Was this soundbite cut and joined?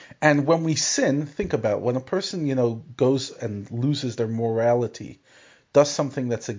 no; 0 cuts

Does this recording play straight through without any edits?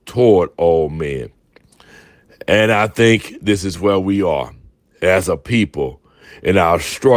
yes; 0 cuts

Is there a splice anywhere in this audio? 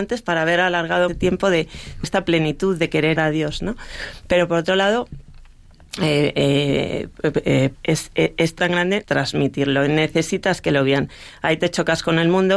yes; 6 cuts; at 1.1 s, 2.0 s, 3.2 s, 7.7 s, 8.6 s, 9.0 s

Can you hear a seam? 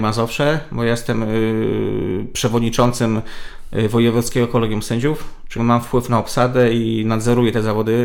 yes; 1 cut; at 5.6 s

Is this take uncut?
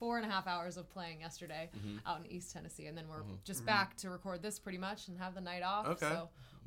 yes; 0 cuts

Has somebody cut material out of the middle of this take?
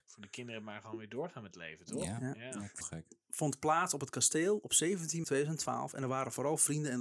yes; 2 cuts; at 2.8 s, 5.2 s

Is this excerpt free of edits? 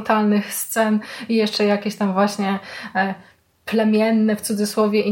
yes; 0 cuts

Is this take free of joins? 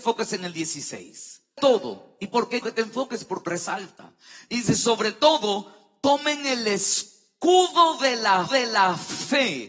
no; 4 cuts; at 1.6 s, 2.6 s, 3.5 s, 8.5 s

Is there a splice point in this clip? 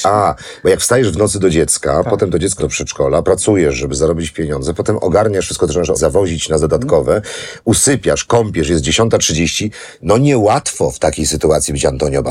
yes; 4 cuts; at 2.6 s, 3.2 s, 5.9 s, 6.6 s

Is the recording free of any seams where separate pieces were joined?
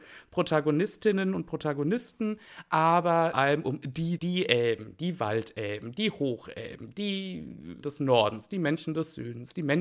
no; 3 cuts; at 3.3 s, 4.2 s, 7.8 s

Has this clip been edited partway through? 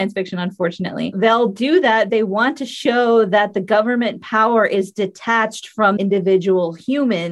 yes; 3 cuts; at 1.1 s, 2.1 s, 6.0 s

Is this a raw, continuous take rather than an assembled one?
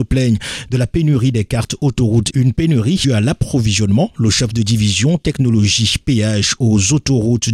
no; 2 cuts; at 2.3 s, 3.0 s

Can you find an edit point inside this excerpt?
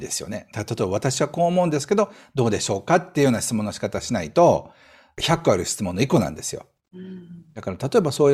no; 0 cuts

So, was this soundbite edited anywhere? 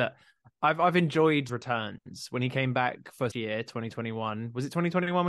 yes; 2 cuts; at 1.5 s, 3.3 s

